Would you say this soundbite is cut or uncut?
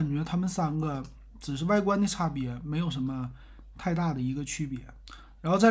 uncut